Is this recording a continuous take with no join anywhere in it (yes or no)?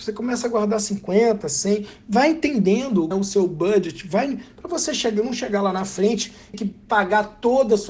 no